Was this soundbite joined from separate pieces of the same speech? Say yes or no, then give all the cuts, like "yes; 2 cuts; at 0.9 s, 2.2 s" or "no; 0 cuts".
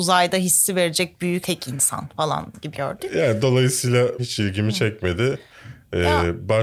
yes; 3 cuts; at 1.4 s, 2.7 s, 4.2 s